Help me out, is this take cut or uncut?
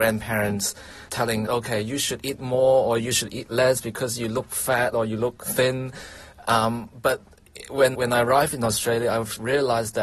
cut